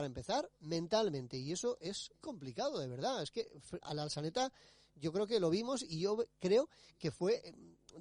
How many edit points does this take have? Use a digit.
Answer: 2